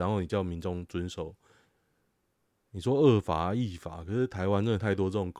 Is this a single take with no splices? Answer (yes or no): yes